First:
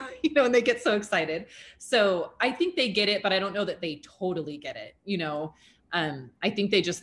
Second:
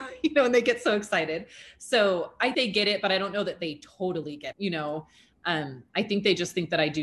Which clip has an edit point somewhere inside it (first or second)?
second